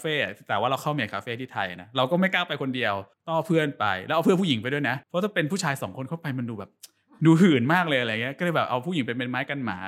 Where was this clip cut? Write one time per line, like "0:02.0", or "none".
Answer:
0:03.1
0:05.0